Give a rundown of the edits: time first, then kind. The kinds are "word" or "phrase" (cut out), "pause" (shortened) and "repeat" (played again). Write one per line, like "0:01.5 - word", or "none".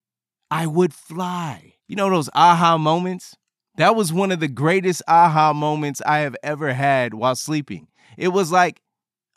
0:01.8 - pause